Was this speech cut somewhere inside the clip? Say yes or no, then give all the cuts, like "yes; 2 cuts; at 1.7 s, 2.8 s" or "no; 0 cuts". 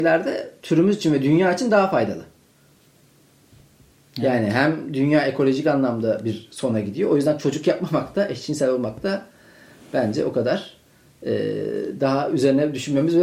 no; 0 cuts